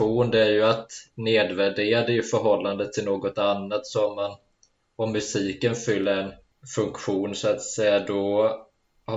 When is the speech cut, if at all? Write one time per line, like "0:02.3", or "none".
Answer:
none